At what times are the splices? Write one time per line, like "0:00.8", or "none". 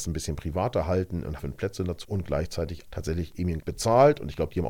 0:01.4
0:02.0
0:02.9
0:03.6